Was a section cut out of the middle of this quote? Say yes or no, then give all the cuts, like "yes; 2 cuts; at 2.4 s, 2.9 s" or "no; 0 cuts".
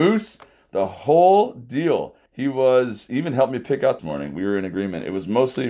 yes; 2 cuts; at 2.3 s, 4.0 s